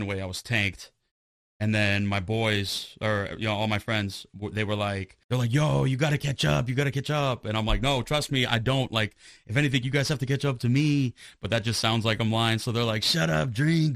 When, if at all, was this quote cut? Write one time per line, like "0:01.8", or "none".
0:05.2